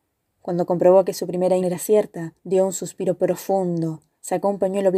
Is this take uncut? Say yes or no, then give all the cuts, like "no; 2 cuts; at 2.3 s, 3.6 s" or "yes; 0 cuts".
no; 2 cuts; at 1.6 s, 2.4 s